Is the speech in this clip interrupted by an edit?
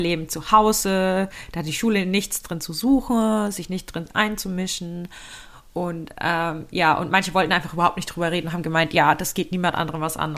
no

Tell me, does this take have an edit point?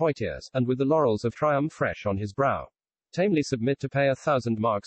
yes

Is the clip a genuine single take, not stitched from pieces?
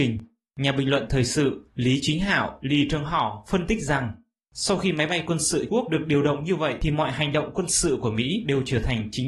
no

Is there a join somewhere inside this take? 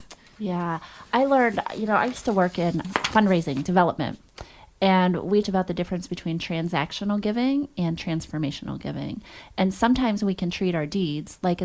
yes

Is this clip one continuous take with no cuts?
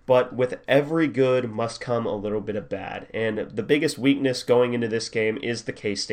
yes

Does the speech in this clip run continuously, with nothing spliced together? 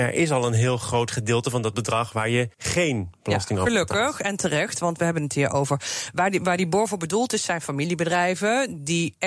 no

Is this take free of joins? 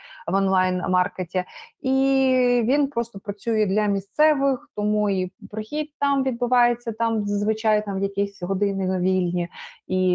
yes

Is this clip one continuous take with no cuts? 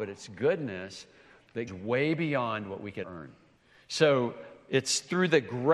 no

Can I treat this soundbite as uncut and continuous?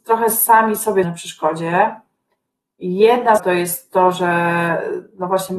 no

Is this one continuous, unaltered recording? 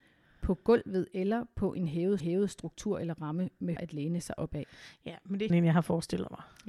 no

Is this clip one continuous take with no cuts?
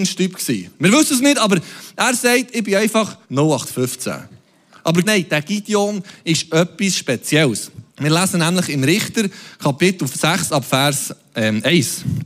no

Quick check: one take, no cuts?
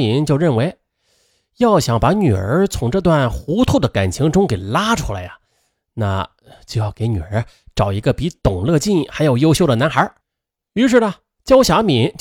yes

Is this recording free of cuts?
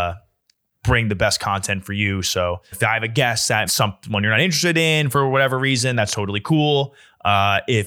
no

